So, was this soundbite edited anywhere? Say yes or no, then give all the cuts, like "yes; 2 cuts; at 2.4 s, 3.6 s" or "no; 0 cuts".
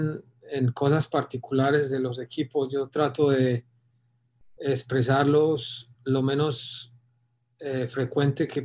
no; 0 cuts